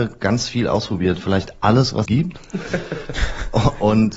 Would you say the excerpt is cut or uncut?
cut